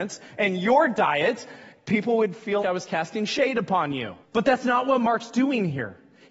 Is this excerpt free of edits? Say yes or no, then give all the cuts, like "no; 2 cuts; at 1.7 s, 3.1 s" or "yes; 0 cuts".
no; 2 cuts; at 2.6 s, 4.2 s